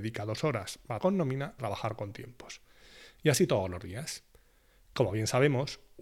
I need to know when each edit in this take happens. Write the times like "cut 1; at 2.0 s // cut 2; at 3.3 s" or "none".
cut 1; at 1.0 s // cut 2; at 1.6 s